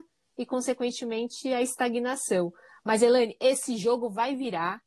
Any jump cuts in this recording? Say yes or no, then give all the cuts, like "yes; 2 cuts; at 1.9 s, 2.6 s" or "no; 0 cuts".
no; 0 cuts